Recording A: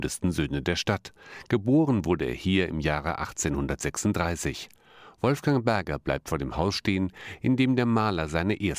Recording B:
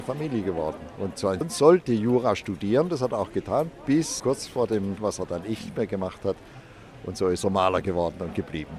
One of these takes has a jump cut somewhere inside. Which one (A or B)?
B